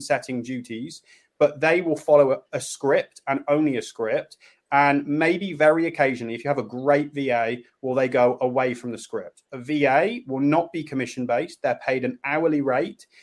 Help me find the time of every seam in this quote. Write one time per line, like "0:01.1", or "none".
none